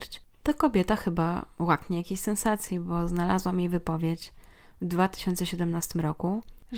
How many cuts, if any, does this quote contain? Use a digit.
0